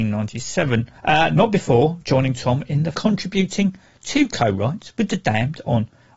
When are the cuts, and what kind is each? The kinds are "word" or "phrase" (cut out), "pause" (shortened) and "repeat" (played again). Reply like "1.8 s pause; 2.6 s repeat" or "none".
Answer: 1.0 s pause; 2.9 s phrase